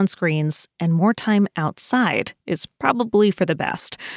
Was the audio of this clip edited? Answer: no; 0 cuts

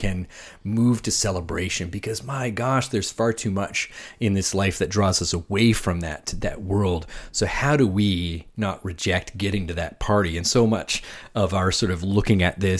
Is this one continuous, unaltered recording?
yes; 0 cuts

